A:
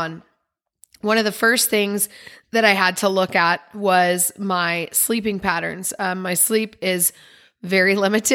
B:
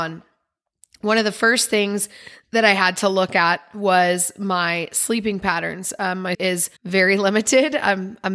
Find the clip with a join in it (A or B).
B